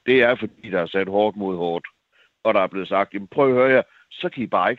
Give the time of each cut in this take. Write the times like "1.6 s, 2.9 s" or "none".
none